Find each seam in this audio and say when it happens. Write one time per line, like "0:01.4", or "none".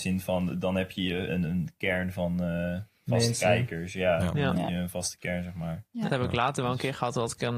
0:01.3
0:06.1